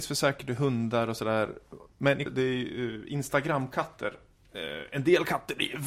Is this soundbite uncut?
no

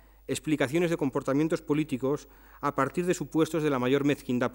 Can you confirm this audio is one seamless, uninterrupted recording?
yes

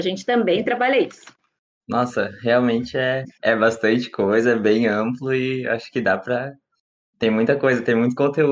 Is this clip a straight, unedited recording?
yes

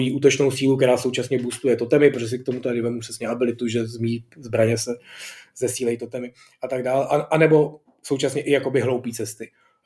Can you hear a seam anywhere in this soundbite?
no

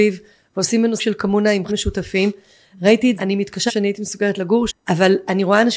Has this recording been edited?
yes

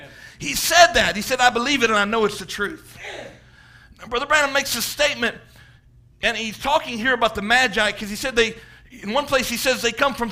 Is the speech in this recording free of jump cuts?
yes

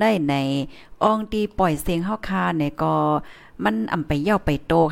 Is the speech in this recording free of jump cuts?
yes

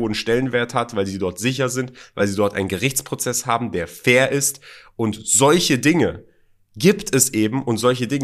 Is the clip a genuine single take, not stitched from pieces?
yes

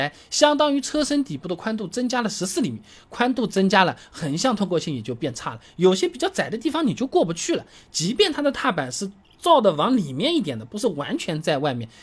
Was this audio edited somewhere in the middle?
no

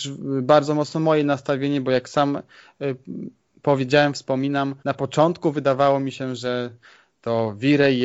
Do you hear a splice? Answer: yes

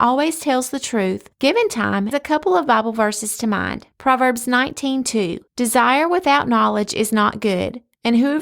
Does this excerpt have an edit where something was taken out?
yes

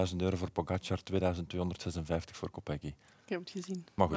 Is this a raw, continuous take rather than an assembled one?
yes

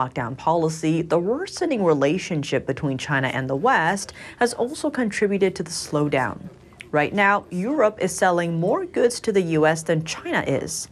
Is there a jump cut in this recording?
no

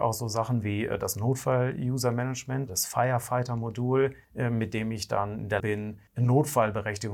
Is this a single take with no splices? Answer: no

